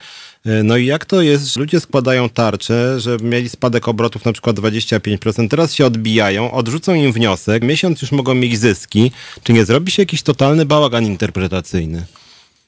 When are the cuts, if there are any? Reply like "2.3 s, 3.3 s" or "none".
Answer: 1.6 s, 7.6 s